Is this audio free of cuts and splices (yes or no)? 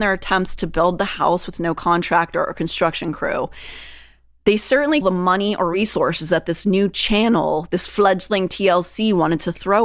no